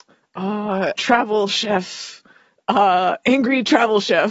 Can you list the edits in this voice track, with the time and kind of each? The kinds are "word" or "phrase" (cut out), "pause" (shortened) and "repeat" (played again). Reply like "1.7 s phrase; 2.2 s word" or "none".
1.0 s word